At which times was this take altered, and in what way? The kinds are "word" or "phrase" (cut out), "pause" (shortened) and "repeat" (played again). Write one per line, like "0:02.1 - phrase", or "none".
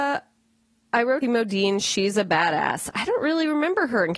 0:01.2 - phrase

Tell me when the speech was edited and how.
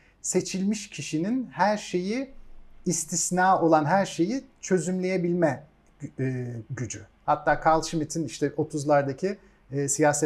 none

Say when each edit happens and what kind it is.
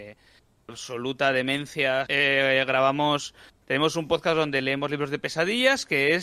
0:02.1 - word

